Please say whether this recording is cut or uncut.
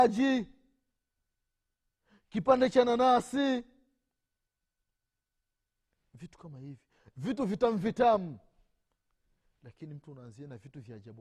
uncut